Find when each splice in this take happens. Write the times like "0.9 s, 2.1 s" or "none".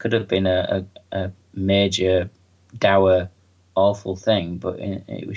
none